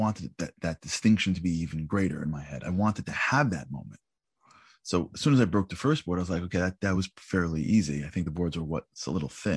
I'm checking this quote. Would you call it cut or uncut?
uncut